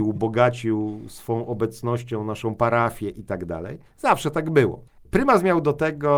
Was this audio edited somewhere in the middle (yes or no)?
no